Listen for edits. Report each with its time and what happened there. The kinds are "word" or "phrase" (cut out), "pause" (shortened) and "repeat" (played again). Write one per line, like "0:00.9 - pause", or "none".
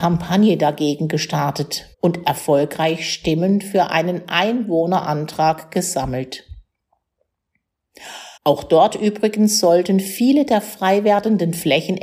0:01.9 - pause
0:08.4 - pause

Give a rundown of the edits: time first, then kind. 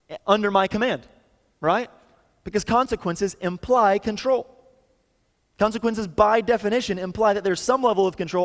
none

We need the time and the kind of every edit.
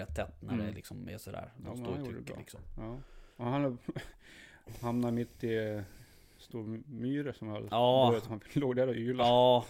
0:03.3 - pause

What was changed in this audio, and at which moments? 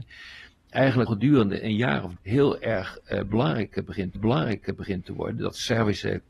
0:01.1 - word
0:02.2 - word
0:04.1 - repeat

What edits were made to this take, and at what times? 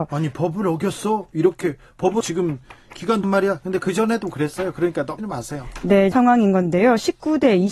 0:02.2 - word
0:03.2 - word
0:05.2 - word
0:06.1 - word

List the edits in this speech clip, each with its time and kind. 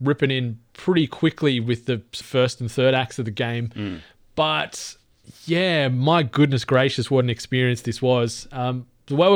0:02.2 - word

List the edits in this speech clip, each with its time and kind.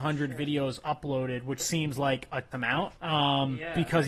0:01.6 - word
0:02.5 - word
0:03.0 - pause

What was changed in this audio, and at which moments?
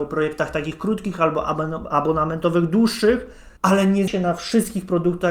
0:03.6 - pause
0:04.1 - word

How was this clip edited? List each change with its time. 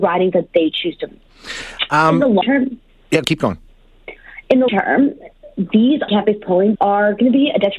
0:01.1 - word
0:02.4 - word
0:03.2 - word
0:04.7 - word
0:06.1 - word
0:06.8 - word

